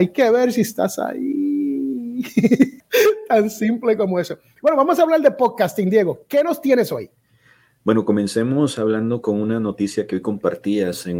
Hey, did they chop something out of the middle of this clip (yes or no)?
no